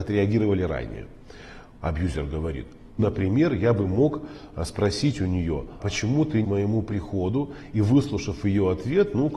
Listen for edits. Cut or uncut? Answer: cut